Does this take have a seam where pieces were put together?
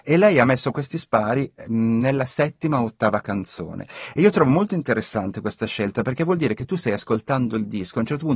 no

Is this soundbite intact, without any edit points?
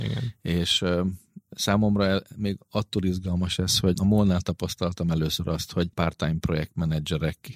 no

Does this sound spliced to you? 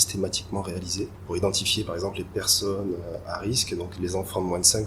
no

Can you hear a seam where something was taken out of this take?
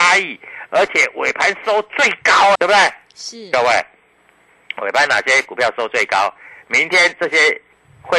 yes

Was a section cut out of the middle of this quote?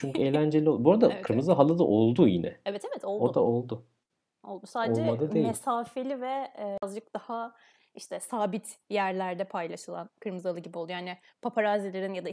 no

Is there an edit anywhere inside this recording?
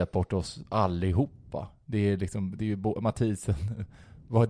no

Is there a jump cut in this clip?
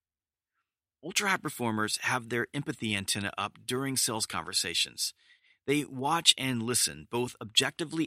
no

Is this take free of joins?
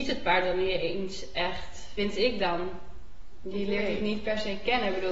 yes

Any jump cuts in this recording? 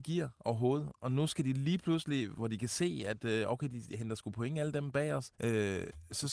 yes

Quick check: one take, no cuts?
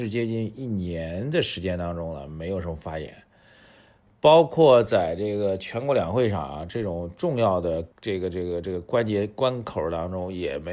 no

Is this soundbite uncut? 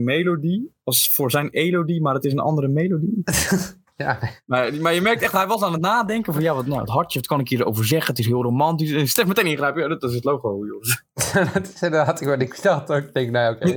yes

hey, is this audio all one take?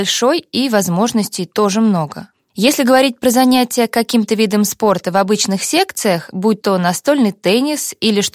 yes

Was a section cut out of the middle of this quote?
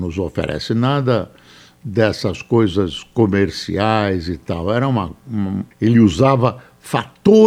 yes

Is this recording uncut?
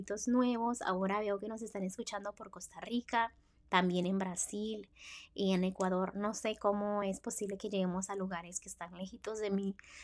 yes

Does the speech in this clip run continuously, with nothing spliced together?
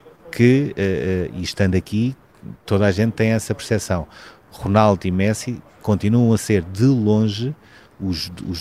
yes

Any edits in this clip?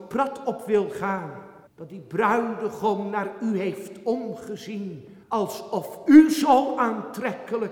yes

